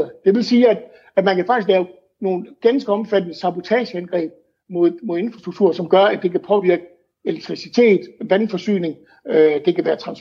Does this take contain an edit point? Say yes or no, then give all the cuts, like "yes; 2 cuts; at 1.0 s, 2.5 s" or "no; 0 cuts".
no; 0 cuts